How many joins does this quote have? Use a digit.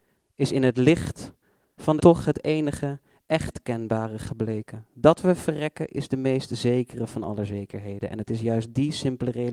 1